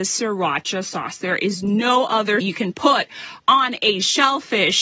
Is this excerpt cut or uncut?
cut